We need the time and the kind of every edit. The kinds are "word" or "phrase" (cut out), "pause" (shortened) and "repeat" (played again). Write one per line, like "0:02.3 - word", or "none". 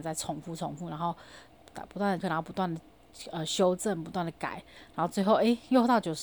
0:02.2 - word